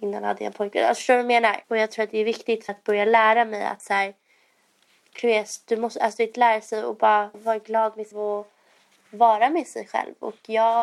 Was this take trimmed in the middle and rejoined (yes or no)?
yes